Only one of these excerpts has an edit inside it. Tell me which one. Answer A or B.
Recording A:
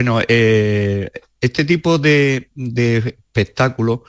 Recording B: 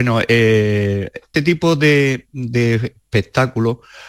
B